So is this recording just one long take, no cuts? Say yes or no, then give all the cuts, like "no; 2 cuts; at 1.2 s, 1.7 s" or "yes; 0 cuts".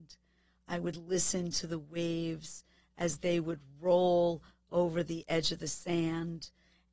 yes; 0 cuts